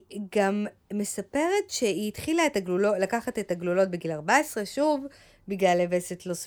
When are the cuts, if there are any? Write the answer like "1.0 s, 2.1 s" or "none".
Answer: none

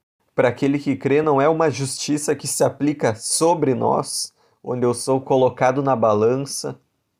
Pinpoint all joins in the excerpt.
none

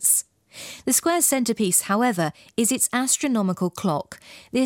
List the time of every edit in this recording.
none

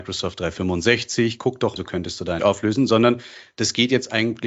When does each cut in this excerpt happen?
1.8 s, 2.4 s

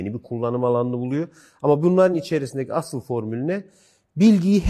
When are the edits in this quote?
none

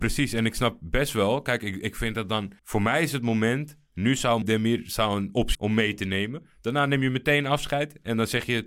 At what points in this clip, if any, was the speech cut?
2.6 s, 4.4 s, 5.5 s

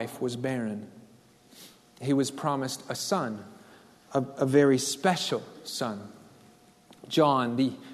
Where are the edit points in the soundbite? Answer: none

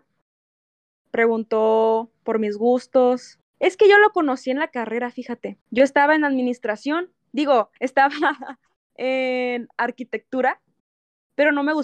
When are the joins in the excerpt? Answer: 3.5 s, 5.6 s, 7.8 s

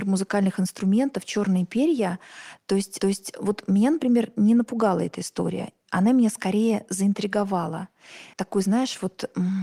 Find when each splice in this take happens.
3.0 s, 8.3 s

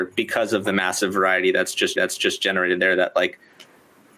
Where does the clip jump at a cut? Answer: 2.0 s

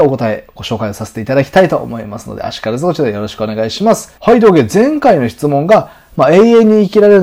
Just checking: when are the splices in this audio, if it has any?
4.2 s

